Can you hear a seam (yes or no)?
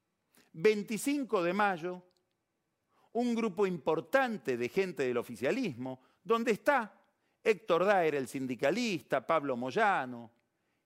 no